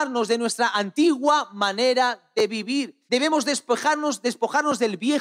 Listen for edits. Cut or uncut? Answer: cut